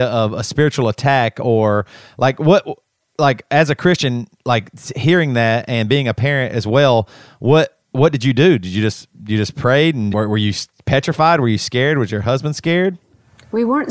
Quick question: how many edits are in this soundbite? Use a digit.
1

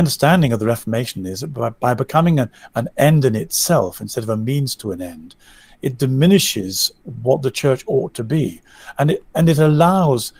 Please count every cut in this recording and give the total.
0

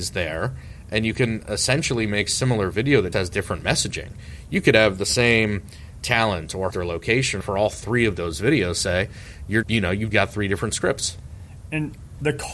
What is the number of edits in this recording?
6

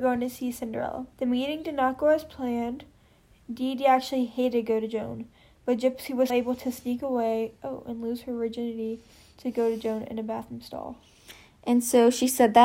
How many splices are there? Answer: 2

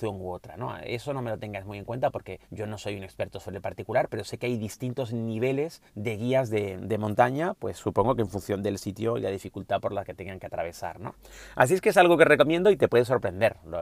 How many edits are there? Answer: 2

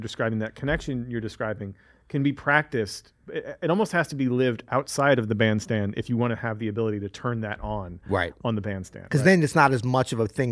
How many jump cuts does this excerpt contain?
0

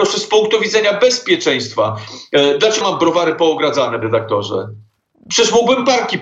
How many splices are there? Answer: 2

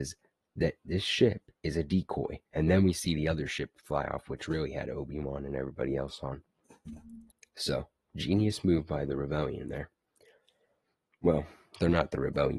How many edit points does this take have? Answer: 3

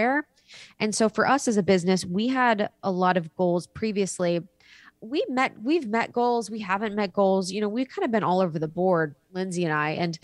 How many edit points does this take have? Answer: 0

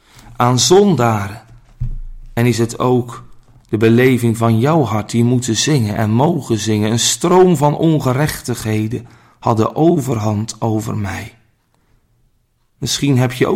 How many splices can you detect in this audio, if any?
0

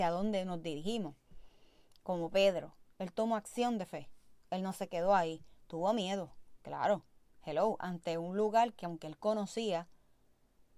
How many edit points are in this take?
0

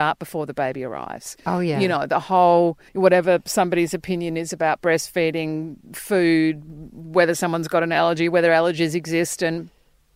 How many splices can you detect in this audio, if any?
1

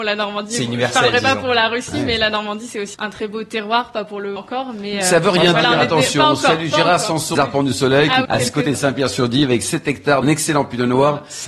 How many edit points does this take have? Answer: 5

